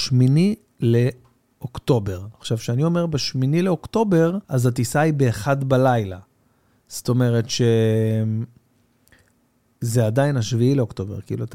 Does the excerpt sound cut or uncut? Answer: cut